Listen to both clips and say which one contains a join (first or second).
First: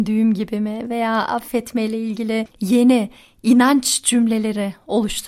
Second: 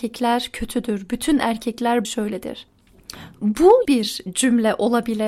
second